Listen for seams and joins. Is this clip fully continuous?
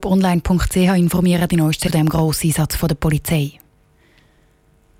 no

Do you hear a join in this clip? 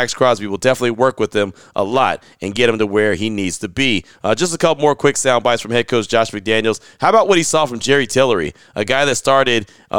no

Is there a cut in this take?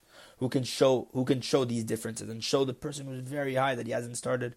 no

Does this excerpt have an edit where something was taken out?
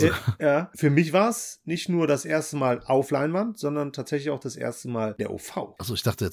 yes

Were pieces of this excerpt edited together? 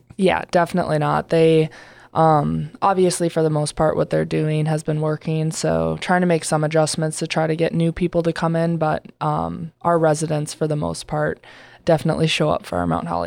no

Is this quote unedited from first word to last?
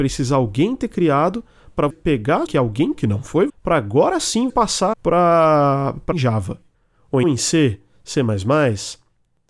no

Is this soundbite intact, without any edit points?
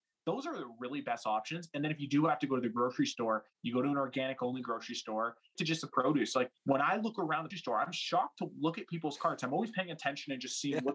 no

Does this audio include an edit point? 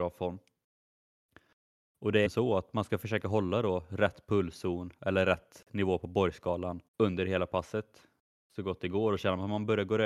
yes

